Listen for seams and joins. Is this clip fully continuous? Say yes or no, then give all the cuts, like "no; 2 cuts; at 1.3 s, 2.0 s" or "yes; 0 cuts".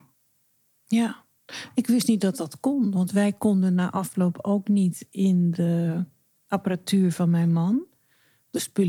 yes; 0 cuts